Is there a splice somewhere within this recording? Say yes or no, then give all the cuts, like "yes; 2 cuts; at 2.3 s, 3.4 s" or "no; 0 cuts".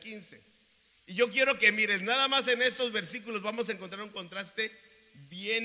no; 0 cuts